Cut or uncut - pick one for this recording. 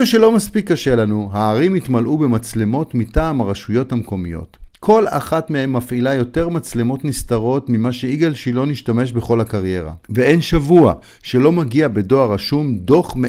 cut